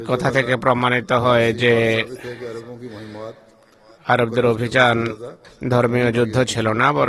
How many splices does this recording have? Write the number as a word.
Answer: zero